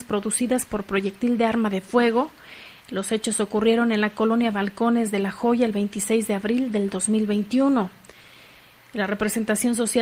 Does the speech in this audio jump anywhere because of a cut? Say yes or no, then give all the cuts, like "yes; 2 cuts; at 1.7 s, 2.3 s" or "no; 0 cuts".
no; 0 cuts